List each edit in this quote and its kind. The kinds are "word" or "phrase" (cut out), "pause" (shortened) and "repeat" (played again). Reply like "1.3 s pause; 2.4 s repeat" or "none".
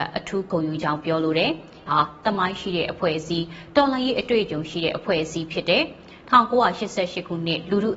1.9 s word